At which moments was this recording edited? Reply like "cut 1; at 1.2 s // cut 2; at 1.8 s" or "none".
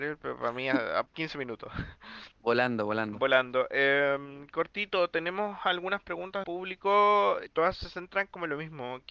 cut 1; at 1.1 s // cut 2; at 2.3 s // cut 3; at 6.4 s // cut 4; at 7.5 s